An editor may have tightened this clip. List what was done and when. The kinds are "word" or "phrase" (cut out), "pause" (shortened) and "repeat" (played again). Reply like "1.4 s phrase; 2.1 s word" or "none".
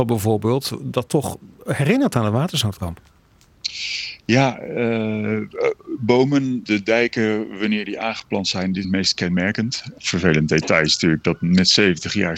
6.6 s word; 8.8 s word